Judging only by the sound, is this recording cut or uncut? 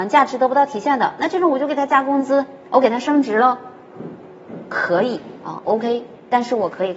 uncut